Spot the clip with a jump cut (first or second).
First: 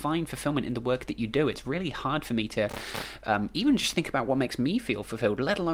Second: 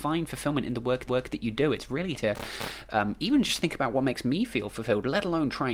second